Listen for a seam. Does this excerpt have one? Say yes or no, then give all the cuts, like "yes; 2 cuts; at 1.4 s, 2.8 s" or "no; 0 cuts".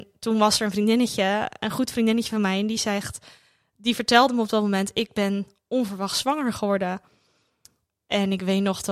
no; 0 cuts